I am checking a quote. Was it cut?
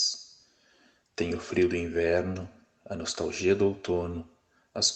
no; 0 cuts

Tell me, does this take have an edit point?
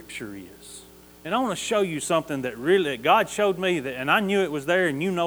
yes; 1 cut; at 1.0 s

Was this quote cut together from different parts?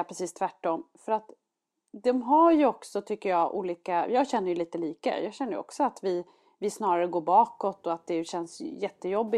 no; 0 cuts

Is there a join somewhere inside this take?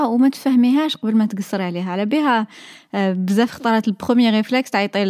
no; 0 cuts

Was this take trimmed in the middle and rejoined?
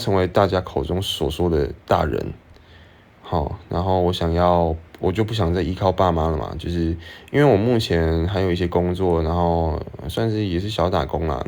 yes; 1 cut; at 4.9 s

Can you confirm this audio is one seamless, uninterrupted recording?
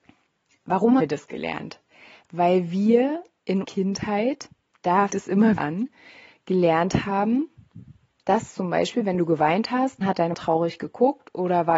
no; 6 cuts; at 1.0 s, 3.6 s, 5.1 s, 5.6 s, 10.0 s, 10.3 s

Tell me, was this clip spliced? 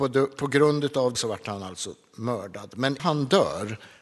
yes; 2 cuts; at 1.1 s, 3.0 s

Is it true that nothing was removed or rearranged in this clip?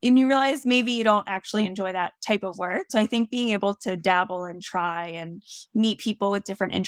yes; 0 cuts

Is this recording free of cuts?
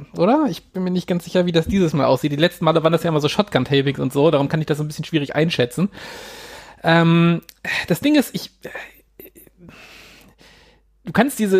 yes; 0 cuts

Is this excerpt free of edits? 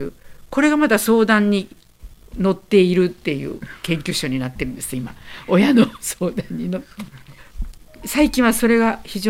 yes; 0 cuts

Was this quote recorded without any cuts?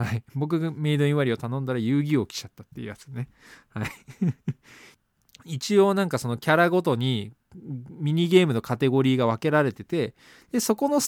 yes; 0 cuts

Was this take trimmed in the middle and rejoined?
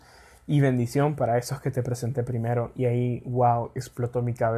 no; 0 cuts

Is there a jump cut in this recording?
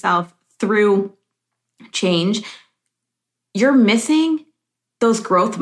no; 0 cuts

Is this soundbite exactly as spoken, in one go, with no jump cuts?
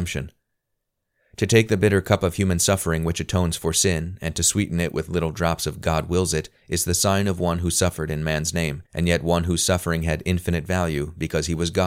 no; 1 cut; at 8.9 s

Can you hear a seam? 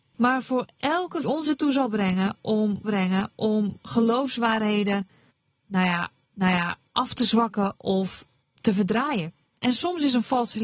yes; 5 cuts; at 1.2 s, 2.8 s, 6.3 s, 8.4 s, 9.5 s

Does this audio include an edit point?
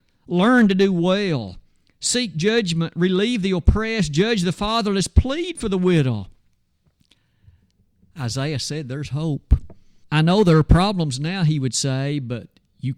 yes; 1 cut; at 10.0 s

